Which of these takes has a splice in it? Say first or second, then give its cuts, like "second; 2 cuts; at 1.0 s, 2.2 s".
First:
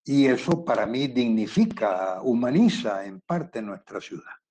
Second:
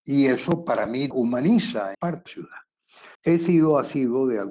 second; 4 cuts; at 1.1 s, 1.9 s, 2.3 s, 3.1 s